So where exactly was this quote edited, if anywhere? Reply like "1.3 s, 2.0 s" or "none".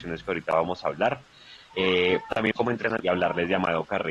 2.5 s, 3.0 s